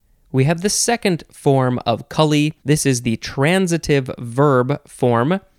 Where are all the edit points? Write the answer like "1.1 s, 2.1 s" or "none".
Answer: 2.6 s

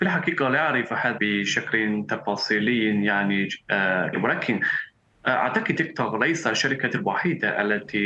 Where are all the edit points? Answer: 1.2 s, 4.1 s, 5.8 s

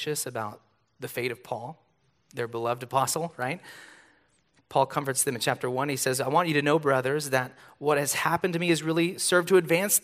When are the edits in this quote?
none

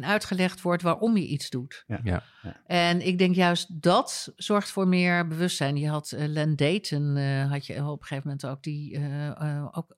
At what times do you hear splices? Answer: none

